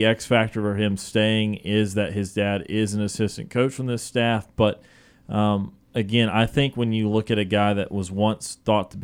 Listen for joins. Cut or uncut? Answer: uncut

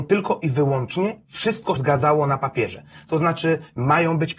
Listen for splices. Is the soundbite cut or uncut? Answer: cut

